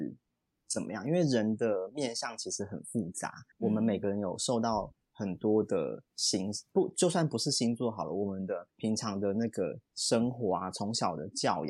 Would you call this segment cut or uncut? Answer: cut